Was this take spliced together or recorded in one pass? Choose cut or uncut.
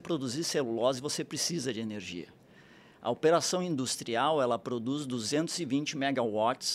uncut